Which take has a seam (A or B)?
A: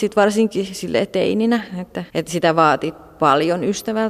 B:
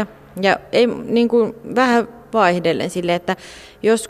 A